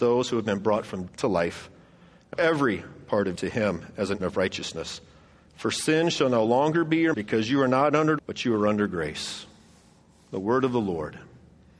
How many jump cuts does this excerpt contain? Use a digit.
6